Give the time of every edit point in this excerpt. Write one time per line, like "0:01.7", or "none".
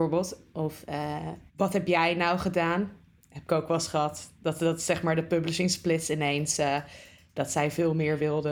0:01.5